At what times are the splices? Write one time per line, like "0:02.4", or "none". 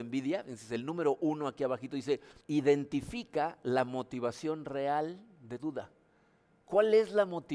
0:02.4
0:05.6